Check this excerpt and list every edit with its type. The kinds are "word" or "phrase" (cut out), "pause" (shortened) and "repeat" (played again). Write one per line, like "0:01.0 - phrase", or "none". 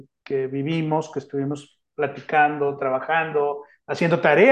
none